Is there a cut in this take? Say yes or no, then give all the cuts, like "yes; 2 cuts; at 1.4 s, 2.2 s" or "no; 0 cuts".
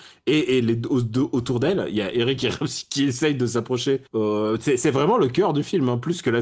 yes; 1 cut; at 4.1 s